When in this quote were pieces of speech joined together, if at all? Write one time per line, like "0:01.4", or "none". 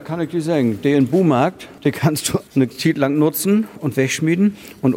none